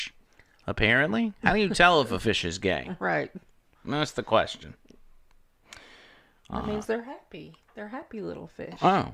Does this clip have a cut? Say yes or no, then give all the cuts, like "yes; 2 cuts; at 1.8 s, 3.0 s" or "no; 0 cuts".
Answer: no; 0 cuts